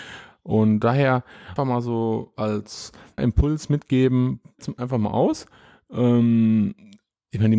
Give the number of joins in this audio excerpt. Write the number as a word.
three